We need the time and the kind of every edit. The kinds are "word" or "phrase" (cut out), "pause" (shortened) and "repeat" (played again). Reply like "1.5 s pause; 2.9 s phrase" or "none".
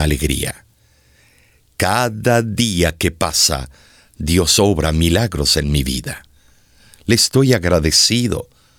none